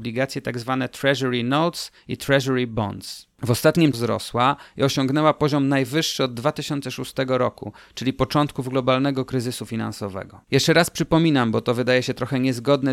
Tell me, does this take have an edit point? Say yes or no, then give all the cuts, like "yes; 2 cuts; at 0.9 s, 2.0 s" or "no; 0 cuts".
yes; 3 cuts; at 3.3 s, 3.9 s, 10.4 s